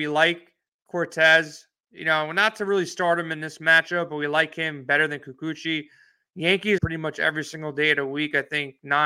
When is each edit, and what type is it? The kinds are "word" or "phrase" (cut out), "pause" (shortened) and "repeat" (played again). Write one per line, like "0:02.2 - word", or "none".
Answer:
0:06.8 - phrase